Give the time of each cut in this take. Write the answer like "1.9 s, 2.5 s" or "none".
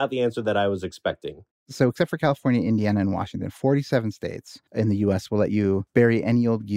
1.5 s, 4.7 s